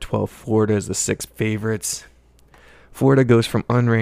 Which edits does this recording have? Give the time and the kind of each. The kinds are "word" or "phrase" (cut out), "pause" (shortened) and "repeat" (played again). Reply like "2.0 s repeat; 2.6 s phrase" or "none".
1.3 s word

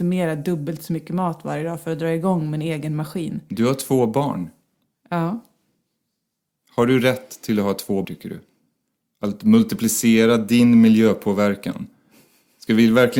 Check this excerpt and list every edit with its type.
8.0 s word

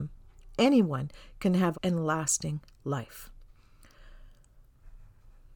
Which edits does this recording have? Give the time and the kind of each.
1.7 s phrase

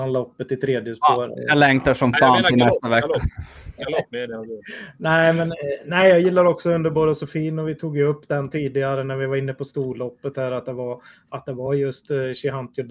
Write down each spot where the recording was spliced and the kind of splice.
none

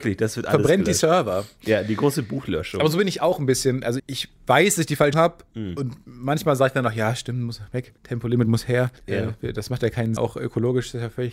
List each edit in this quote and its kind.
4.0 s word; 5.1 s word; 8.0 s pause; 9.0 s pause; 10.2 s word

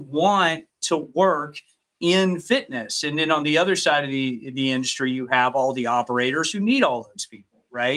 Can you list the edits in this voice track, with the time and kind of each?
none

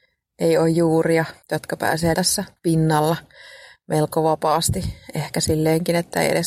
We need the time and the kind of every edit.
1.4 s pause; 2.1 s word; 2.6 s pause

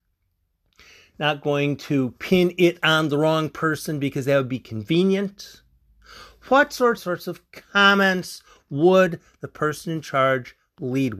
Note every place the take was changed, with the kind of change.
7.0 s phrase

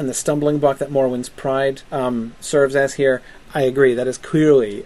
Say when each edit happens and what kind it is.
1.8 s pause

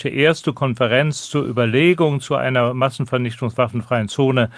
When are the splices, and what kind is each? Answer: none

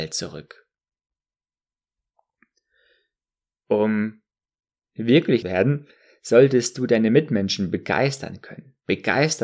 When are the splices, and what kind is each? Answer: 5.4 s phrase

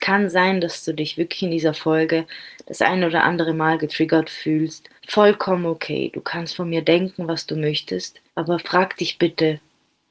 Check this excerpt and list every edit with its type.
5.0 s pause; 8.3 s pause

